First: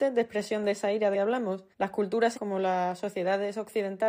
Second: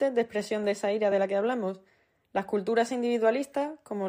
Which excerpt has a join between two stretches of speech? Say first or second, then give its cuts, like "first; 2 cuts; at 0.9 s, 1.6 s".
first; 3 cuts; at 1.1 s, 1.7 s, 2.3 s